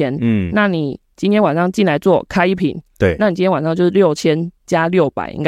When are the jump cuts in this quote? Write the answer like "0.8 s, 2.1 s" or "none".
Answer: none